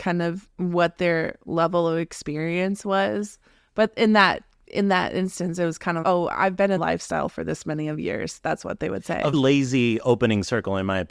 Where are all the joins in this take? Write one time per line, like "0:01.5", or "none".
0:06.0
0:06.8
0:09.3